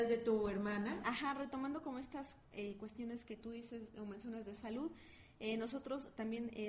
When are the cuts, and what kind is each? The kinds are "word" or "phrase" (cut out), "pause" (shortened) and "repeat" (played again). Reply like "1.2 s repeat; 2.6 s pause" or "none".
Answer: none